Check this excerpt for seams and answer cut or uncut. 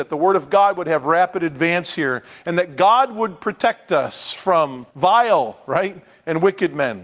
cut